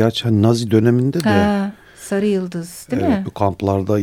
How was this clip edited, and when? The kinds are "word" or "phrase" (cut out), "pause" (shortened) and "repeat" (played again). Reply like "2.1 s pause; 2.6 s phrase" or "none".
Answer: none